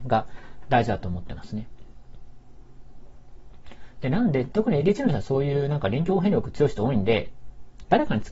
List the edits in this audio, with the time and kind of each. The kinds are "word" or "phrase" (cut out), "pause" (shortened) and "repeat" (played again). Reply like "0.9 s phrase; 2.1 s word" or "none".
none